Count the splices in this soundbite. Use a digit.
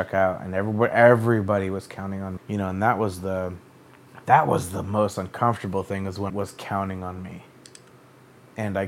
2